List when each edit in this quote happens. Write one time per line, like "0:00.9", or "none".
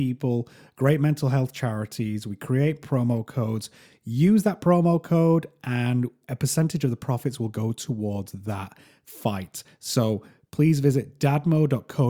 none

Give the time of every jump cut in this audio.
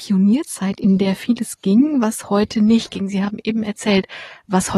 none

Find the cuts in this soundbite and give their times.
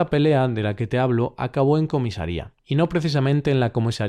0:02.6

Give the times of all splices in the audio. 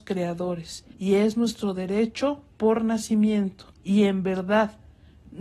0:00.9
0:03.7

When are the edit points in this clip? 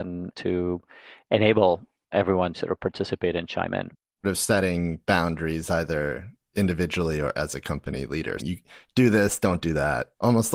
0:02.5
0:04.2
0:08.4

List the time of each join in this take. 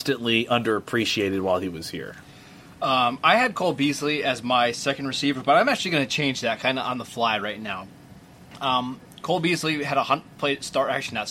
none

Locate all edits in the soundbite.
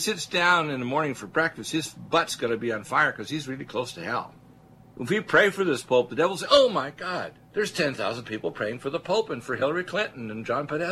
0:04.6
0:07.4

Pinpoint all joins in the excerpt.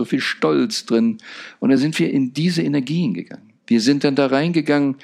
none

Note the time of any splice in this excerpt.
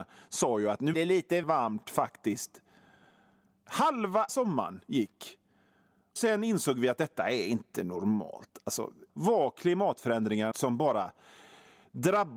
0:00.9
0:01.4
0:04.3
0:06.2
0:09.1
0:10.5

